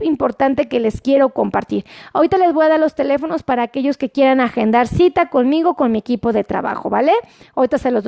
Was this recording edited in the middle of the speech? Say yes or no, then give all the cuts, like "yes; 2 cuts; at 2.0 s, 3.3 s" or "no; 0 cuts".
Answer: no; 0 cuts